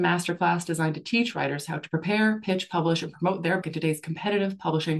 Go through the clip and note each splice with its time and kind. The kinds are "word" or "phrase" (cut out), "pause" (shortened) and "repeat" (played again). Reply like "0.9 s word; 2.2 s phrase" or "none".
3.6 s word